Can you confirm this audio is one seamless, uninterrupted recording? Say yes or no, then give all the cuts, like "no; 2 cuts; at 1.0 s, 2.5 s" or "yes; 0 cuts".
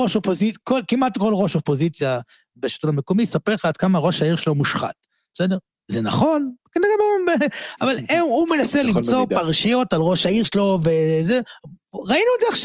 yes; 0 cuts